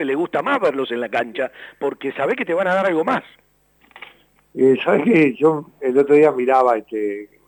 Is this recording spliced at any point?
no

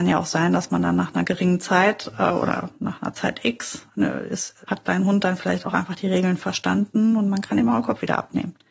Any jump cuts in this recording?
yes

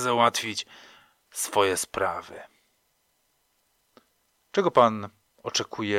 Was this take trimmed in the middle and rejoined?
no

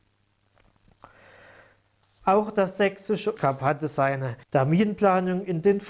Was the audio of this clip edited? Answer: yes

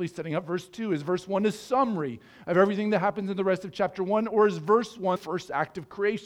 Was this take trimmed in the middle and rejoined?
yes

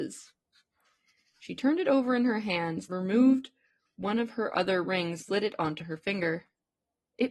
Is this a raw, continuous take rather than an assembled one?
no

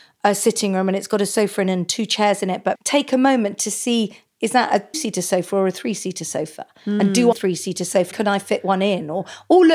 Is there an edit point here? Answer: yes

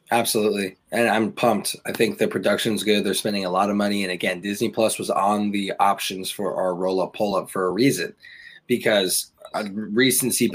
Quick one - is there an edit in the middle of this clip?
no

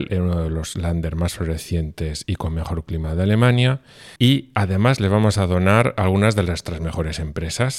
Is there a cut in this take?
yes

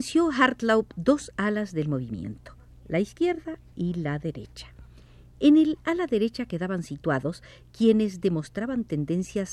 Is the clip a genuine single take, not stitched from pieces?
yes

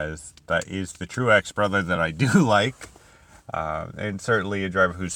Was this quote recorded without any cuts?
yes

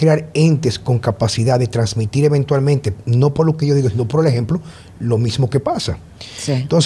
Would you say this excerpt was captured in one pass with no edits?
yes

